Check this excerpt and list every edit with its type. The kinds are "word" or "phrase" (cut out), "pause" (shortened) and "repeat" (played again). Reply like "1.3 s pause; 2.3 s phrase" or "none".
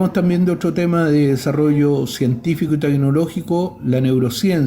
none